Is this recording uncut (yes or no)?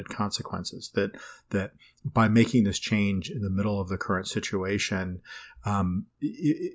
yes